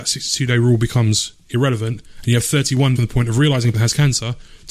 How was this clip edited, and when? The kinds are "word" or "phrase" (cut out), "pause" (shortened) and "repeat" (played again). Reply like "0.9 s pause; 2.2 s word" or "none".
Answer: 3.0 s word; 3.7 s word

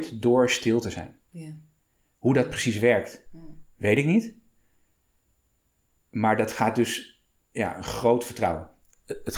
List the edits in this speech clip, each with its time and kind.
none

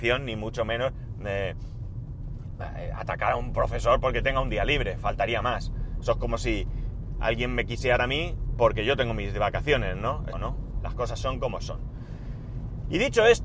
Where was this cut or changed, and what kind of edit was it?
8.0 s word; 10.3 s word

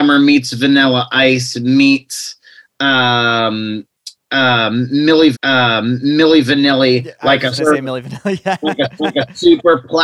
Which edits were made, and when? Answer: 5.3 s repeat; 7.6 s phrase; 9.0 s repeat

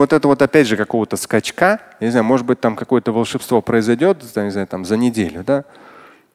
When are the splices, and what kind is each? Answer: none

